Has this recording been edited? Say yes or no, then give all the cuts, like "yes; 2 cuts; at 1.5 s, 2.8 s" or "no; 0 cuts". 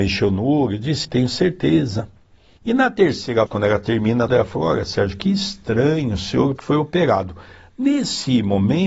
yes; 4 cuts; at 1.0 s, 3.5 s, 4.3 s, 6.6 s